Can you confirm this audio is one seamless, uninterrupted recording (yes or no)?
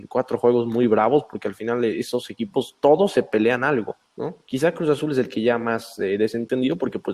no